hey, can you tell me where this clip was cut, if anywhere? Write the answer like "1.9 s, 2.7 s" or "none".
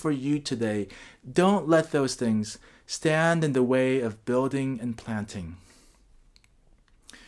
none